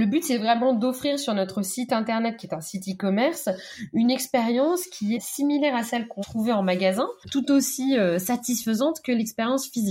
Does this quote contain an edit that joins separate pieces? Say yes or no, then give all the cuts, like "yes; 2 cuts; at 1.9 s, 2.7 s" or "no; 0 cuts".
yes; 2 cuts; at 5.1 s, 6.2 s